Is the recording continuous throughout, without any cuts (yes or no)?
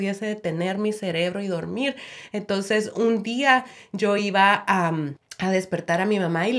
yes